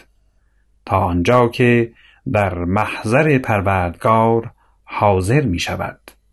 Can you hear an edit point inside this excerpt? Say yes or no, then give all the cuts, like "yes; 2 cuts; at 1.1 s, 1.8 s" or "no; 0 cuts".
no; 0 cuts